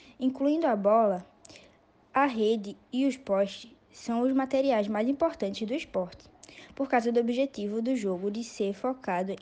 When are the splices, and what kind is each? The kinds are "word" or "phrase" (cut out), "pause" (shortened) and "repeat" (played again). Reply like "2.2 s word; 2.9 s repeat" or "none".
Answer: none